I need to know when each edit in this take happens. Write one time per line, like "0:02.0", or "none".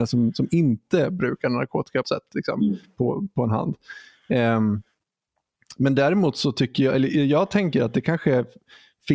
0:02.0